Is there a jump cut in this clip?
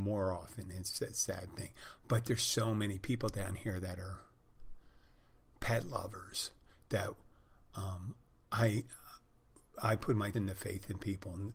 yes; 1 cut; at 10.3 s

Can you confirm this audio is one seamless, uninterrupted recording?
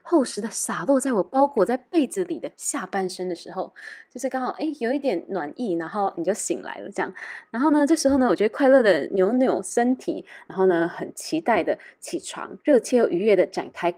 no; 1 cut; at 12.6 s

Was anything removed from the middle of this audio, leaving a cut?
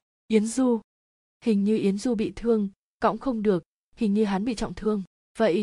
no; 0 cuts

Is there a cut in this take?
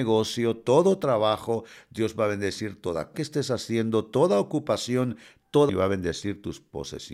yes; 2 cuts; at 3.1 s, 5.7 s

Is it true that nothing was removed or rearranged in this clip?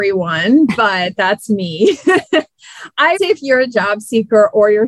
no; 1 cut; at 3.1 s

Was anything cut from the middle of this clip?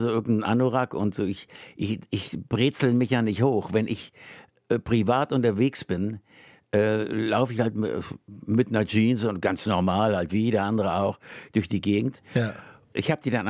no; 0 cuts

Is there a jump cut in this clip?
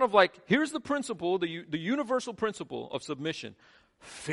no; 0 cuts

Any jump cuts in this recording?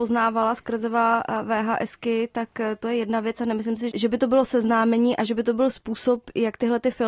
no; 0 cuts

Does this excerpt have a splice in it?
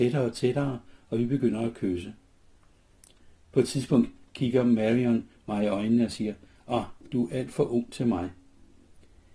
no; 0 cuts

